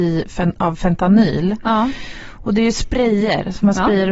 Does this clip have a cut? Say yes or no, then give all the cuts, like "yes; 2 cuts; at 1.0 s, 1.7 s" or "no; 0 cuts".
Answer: no; 0 cuts